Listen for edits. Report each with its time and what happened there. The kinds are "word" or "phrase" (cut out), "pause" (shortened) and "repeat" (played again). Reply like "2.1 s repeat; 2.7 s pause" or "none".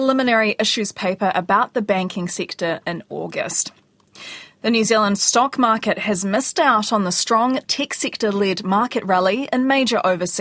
none